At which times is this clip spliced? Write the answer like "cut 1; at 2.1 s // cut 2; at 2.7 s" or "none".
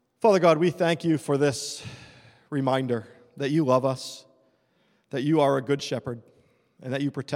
none